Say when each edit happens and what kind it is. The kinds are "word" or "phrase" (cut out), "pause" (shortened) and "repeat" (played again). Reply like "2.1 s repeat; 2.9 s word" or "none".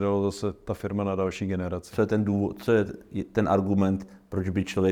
none